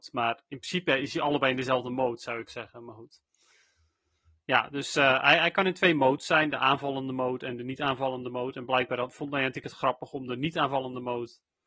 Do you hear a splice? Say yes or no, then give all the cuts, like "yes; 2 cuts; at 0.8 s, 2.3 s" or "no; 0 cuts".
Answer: no; 0 cuts